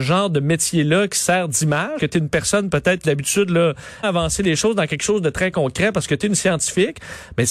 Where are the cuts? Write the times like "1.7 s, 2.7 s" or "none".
2.0 s, 3.0 s, 4.0 s